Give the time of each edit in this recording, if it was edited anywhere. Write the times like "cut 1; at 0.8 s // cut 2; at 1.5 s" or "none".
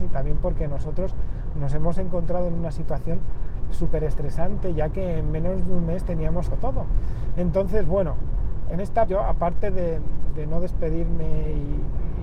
cut 1; at 6.5 s // cut 2; at 8.7 s // cut 3; at 9.1 s

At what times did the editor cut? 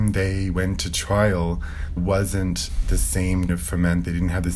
cut 1; at 2.0 s // cut 2; at 3.5 s

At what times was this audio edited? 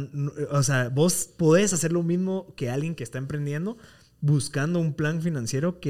none

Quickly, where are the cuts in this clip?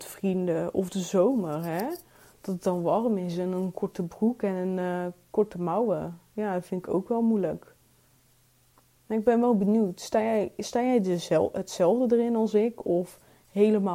none

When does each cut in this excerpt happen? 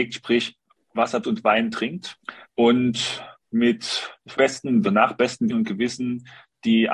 cut 1; at 1.2 s // cut 2; at 2.4 s // cut 3; at 4.3 s // cut 4; at 4.8 s // cut 5; at 5.5 s

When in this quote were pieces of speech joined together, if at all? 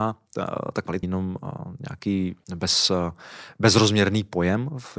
cut 1; at 1.0 s // cut 2; at 2.4 s

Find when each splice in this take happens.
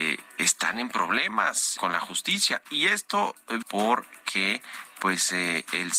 cut 1; at 1.8 s // cut 2; at 3.6 s

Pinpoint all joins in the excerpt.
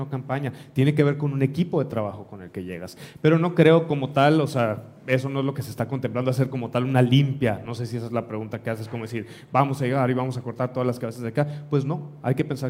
none

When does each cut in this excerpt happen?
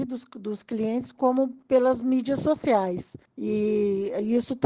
cut 1; at 3.3 s

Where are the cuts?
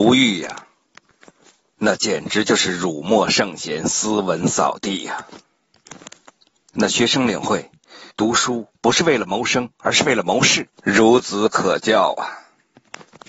cut 1; at 8.1 s // cut 2; at 8.8 s // cut 3; at 10.7 s

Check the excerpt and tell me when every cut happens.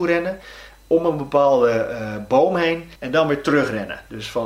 cut 1; at 3.0 s

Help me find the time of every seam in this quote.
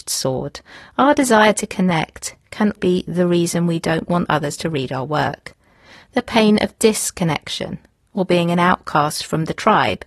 cut 1; at 2.8 s

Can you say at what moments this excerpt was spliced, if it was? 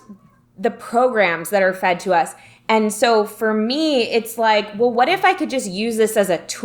none

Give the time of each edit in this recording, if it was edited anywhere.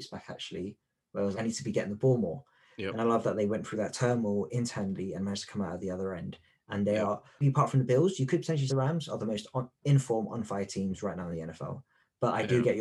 cut 1; at 1.3 s // cut 2; at 7.4 s // cut 3; at 8.7 s // cut 4; at 9.7 s

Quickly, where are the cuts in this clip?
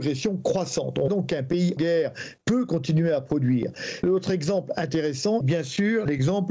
cut 1; at 1.1 s // cut 2; at 1.8 s // cut 3; at 5.4 s

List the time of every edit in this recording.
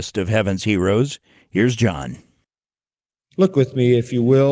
none

